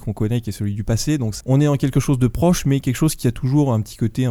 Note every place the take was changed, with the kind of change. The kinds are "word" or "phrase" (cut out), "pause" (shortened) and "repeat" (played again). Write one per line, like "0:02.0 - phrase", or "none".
0:01.4 - word